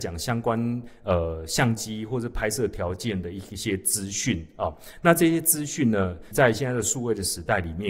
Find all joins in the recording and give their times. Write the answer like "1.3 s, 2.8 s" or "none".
6.3 s